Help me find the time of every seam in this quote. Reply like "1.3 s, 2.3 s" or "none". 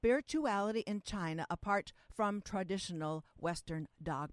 none